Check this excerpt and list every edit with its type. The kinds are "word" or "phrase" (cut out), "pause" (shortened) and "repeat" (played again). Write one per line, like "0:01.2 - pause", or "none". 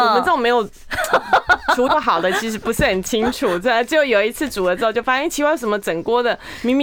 0:01.9 - phrase